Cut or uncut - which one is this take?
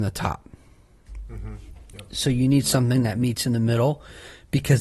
uncut